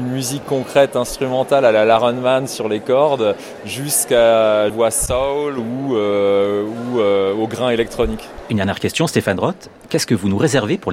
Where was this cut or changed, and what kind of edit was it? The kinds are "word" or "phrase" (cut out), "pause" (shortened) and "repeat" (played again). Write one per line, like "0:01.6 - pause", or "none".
0:04.7 - phrase